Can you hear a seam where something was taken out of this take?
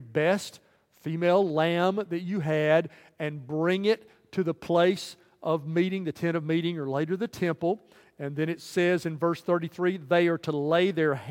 no; 0 cuts

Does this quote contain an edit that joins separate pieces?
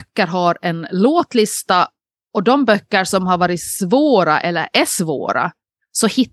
no; 0 cuts

